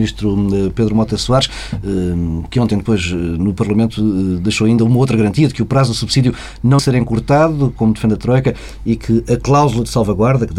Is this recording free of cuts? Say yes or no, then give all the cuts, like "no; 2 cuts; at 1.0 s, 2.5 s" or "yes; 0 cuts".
no; 1 cut; at 6.8 s